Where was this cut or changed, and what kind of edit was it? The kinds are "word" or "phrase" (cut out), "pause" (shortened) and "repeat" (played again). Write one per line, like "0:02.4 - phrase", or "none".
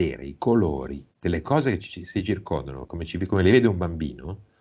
0:01.1 - pause